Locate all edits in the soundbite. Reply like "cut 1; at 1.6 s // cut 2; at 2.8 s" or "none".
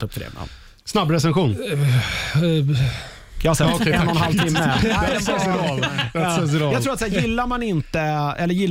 none